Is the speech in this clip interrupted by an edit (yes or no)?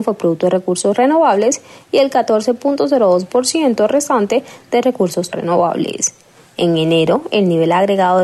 yes